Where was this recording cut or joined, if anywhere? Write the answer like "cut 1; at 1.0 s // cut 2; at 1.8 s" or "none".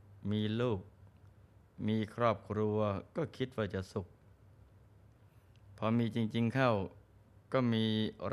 none

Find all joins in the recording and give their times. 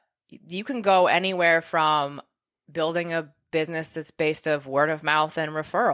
none

